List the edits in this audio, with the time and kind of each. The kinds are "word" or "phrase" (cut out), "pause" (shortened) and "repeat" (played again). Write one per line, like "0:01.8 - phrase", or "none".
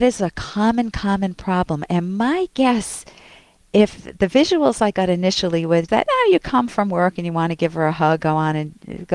0:05.9 - word
0:06.7 - word
0:08.2 - word